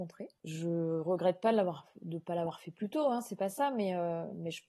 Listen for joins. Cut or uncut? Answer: uncut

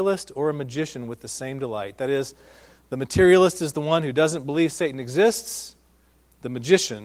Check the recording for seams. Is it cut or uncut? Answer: uncut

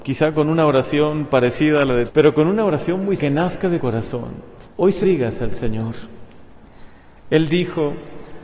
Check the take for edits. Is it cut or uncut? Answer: cut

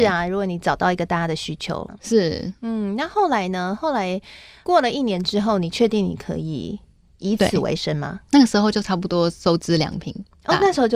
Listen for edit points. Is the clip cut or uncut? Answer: uncut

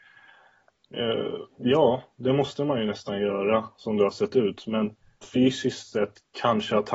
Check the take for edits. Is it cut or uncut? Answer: cut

